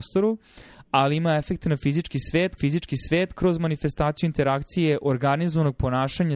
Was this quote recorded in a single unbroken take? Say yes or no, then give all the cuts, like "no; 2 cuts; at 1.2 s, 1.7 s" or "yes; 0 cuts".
no; 1 cut; at 2.6 s